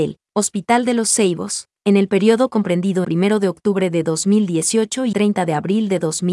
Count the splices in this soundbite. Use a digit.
2